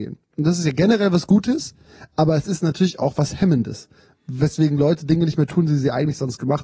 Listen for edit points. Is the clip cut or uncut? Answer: uncut